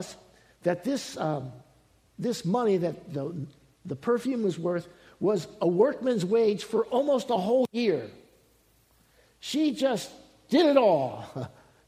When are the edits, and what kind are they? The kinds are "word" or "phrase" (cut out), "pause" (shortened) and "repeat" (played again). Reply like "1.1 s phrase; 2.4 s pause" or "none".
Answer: none